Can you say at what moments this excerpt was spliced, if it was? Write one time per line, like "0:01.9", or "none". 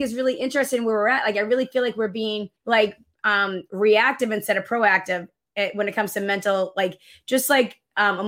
0:02.6